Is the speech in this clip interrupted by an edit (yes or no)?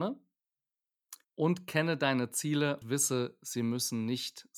yes